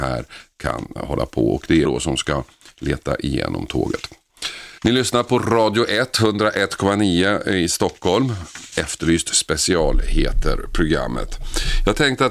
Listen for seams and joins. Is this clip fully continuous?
no; 2 cuts; at 1.8 s, 4.8 s

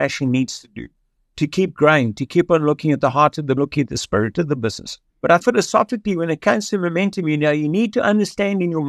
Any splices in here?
yes; 3 cuts; at 3.6 s, 5.1 s, 5.4 s

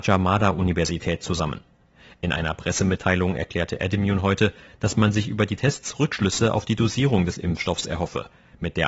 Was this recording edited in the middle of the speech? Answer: no; 0 cuts

